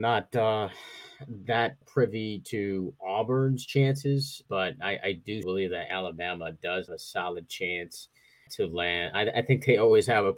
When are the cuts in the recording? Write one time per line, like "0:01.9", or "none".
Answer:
0:01.8
0:04.5
0:05.4
0:06.9
0:08.5